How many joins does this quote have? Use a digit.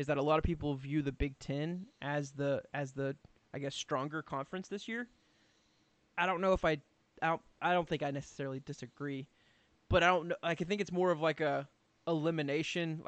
0